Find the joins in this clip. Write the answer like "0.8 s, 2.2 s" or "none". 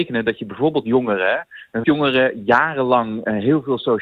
1.8 s